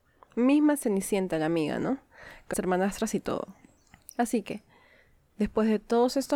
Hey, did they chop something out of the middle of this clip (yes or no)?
yes